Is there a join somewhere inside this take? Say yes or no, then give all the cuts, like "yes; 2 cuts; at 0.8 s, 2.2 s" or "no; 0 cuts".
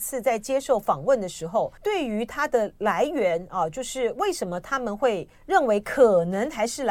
yes; 2 cuts; at 1.8 s, 5.3 s